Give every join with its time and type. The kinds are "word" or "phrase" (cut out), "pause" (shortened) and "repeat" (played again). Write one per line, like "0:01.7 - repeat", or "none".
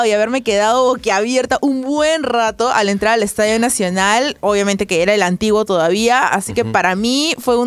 none